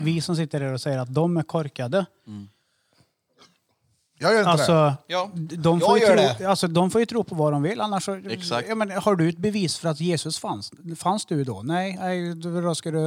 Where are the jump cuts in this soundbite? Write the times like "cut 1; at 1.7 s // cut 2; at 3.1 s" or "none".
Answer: none

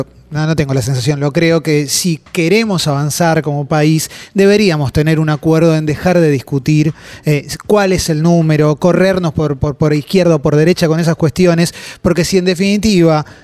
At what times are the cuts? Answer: none

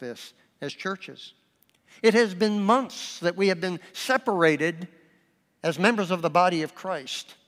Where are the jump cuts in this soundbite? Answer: none

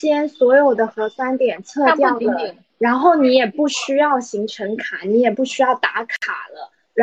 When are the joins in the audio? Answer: none

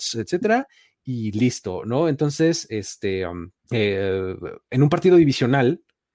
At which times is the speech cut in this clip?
cut 1; at 3.6 s

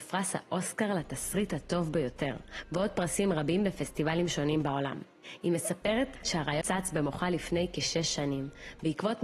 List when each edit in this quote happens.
cut 1; at 6.6 s

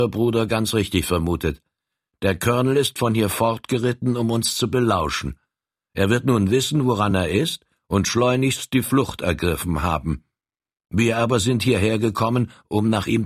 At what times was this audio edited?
none

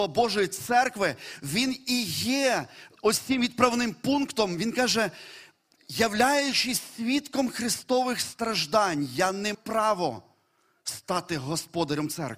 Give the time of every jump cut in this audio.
cut 1; at 3.0 s // cut 2; at 9.5 s

